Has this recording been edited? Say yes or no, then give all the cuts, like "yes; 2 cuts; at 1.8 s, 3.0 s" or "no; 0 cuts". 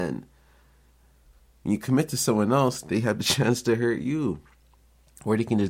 no; 0 cuts